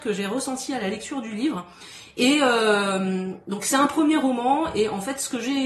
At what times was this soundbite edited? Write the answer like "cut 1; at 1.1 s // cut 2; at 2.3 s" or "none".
none